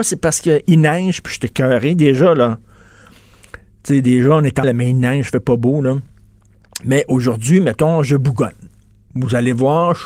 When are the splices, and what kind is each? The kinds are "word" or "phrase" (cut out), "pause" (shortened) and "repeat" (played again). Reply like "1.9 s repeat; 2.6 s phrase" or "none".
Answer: 4.6 s word